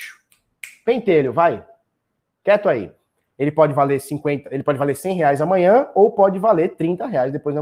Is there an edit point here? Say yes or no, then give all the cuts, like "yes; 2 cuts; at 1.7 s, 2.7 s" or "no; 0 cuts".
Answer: no; 0 cuts